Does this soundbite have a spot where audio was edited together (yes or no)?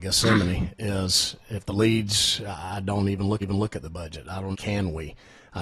yes